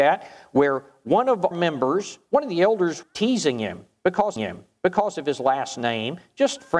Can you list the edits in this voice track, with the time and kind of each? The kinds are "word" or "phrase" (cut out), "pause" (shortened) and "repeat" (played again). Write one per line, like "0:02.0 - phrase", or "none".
0:01.5 - word
0:03.0 - word
0:04.4 - repeat